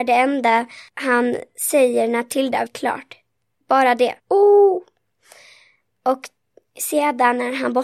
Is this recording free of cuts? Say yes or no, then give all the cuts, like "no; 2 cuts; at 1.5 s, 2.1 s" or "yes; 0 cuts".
no; 2 cuts; at 2.7 s, 4.2 s